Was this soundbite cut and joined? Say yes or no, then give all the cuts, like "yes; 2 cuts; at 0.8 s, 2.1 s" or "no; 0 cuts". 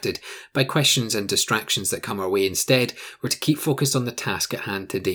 no; 0 cuts